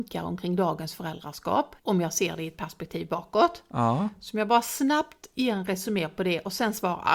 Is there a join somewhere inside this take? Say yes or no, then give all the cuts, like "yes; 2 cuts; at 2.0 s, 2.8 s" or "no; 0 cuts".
yes; 1 cut; at 1.8 s